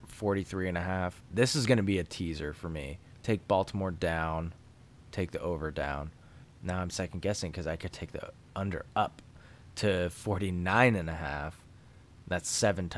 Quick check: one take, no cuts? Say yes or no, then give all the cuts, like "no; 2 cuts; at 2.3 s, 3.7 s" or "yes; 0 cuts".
yes; 0 cuts